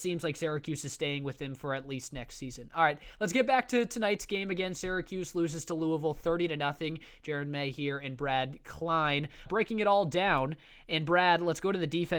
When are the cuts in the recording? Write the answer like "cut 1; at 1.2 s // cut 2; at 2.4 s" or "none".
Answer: cut 1; at 9.5 s